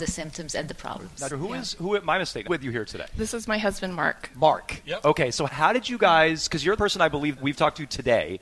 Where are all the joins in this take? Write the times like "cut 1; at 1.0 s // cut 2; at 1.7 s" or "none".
cut 1; at 1.3 s // cut 2; at 2.5 s // cut 3; at 5.5 s // cut 4; at 6.8 s // cut 5; at 7.4 s